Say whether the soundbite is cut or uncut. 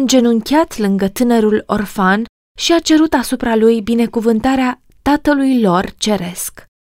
uncut